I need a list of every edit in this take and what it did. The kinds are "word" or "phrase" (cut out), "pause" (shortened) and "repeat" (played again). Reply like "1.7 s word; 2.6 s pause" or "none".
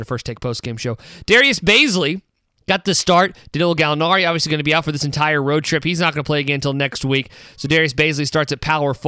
2.5 s pause